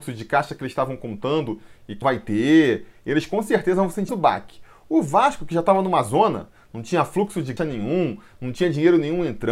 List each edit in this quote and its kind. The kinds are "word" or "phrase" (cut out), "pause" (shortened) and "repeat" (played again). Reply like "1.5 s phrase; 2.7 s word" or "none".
2.0 s word; 4.1 s word; 7.6 s word